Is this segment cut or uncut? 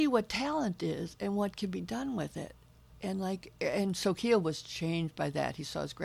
uncut